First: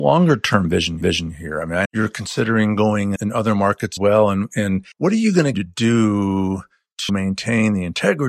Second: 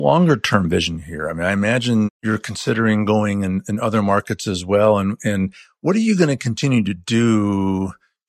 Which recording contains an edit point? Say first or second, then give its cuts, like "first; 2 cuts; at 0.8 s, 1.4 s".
first; 7 cuts; at 1.0 s, 1.9 s, 3.2 s, 4.0 s, 4.9 s, 5.5 s, 7.1 s